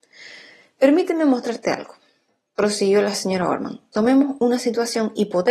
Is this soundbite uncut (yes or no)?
yes